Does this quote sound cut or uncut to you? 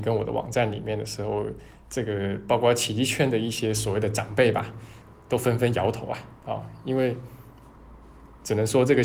cut